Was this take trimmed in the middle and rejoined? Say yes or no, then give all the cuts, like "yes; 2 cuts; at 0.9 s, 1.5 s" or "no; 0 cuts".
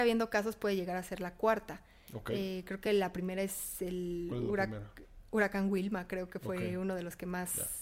no; 0 cuts